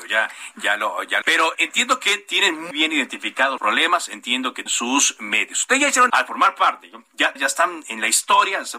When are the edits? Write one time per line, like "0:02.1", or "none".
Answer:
0:01.2
0:01.5
0:02.7
0:03.6
0:04.7
0:06.1
0:07.4